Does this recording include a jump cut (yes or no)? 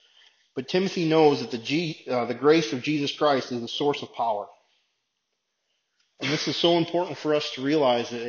no